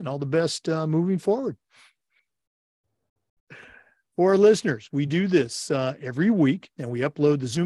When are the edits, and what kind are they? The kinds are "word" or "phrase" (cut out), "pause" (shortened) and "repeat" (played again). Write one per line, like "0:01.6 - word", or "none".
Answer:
none